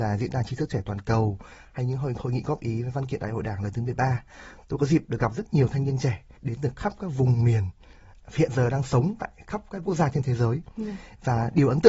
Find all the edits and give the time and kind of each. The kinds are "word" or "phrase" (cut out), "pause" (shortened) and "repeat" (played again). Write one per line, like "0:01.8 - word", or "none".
0:06.3 - pause